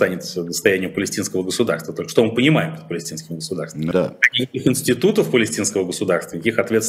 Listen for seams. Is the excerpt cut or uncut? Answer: cut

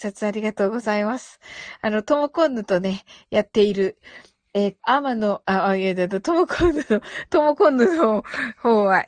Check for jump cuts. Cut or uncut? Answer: cut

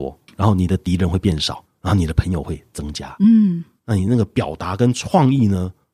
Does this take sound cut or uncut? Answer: cut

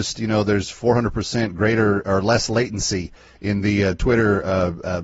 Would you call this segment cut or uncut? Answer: uncut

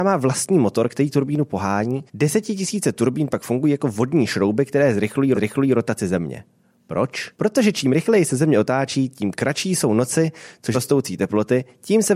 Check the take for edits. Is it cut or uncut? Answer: cut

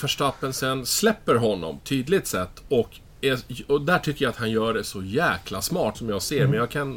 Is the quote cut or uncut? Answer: cut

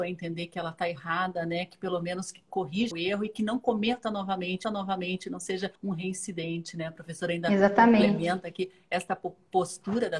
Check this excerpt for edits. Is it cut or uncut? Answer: cut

